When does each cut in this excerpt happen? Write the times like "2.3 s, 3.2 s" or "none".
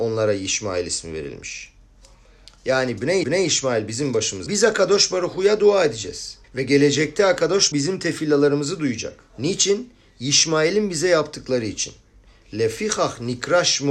3.2 s, 4.5 s, 6.4 s, 7.7 s, 9.3 s